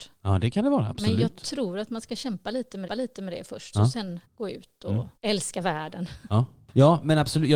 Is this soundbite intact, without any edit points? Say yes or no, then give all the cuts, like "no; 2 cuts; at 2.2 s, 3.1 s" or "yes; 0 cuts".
no; 4 cuts; at 2.9 s, 3.7 s, 4.2 s, 5.2 s